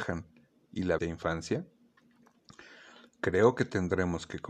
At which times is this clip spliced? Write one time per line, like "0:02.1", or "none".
0:01.0